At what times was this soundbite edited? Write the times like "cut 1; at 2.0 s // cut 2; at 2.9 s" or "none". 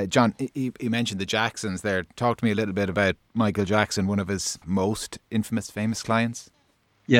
cut 1; at 4.6 s